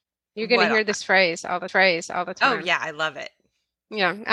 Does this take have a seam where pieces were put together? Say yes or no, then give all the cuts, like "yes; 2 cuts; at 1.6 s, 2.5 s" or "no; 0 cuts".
yes; 1 cut; at 1.7 s